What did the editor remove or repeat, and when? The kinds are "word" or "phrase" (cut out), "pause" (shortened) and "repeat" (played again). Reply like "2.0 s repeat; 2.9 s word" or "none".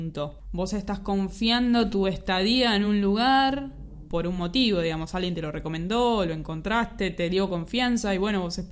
none